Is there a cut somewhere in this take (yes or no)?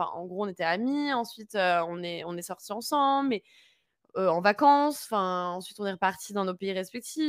no